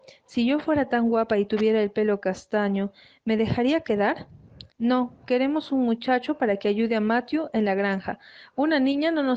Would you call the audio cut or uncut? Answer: cut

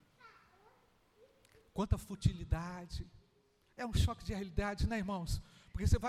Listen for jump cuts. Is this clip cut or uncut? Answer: uncut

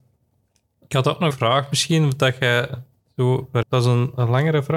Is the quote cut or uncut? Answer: cut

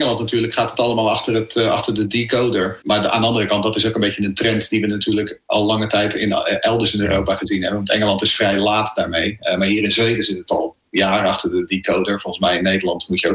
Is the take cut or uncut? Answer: uncut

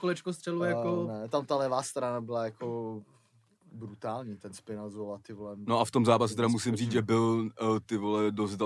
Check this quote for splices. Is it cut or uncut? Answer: uncut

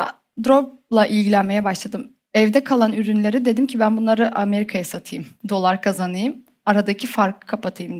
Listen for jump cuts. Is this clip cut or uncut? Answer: uncut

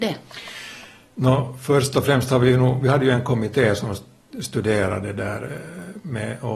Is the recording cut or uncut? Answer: uncut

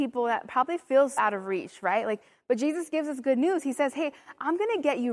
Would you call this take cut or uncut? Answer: cut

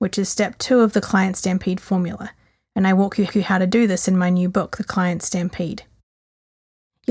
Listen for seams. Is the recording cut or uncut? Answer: cut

